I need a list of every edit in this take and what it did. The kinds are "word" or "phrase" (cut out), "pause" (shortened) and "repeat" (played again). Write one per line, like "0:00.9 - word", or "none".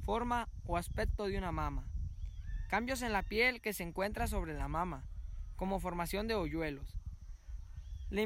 none